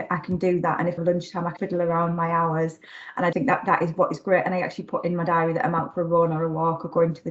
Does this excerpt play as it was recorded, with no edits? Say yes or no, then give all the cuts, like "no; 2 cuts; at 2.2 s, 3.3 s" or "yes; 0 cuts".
no; 3 cuts; at 1.0 s, 1.6 s, 3.3 s